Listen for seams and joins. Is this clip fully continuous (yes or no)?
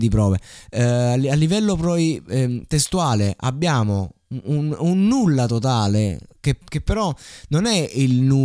yes